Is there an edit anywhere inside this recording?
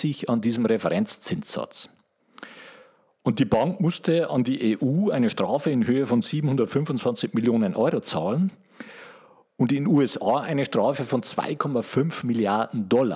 no; 0 cuts

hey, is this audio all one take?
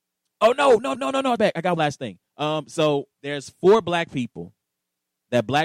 no; 5 cuts; at 0.9 s, 1.4 s, 1.8 s, 2.3 s, 3.1 s

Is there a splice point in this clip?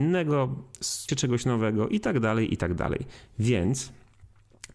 yes; 1 cut; at 1.1 s

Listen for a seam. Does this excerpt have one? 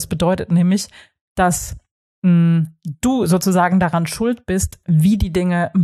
no; 0 cuts

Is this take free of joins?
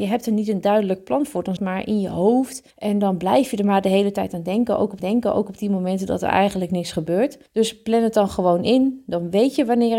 no; 4 cuts; at 1.6 s, 2.7 s, 5.0 s, 7.5 s

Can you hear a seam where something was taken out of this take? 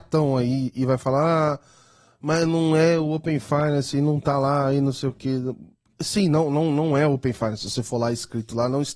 no; 0 cuts

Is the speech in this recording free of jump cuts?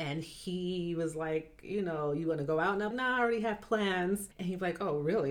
no; 2 cuts; at 2.9 s, 4.3 s

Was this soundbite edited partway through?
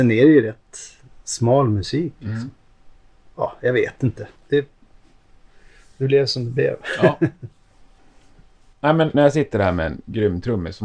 yes; 2 cuts; at 4.4 s, 9.1 s

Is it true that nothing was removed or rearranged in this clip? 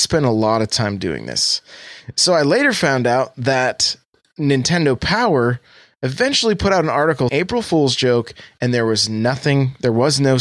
no; 1 cut; at 7.3 s

